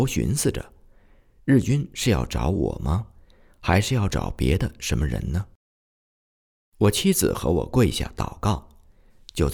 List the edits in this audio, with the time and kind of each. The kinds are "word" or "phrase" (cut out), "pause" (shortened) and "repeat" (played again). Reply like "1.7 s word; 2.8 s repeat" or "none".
none